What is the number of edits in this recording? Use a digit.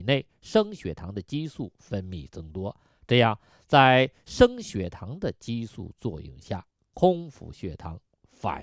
0